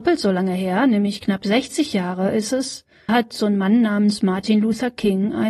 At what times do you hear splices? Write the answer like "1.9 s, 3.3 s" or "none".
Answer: 3.1 s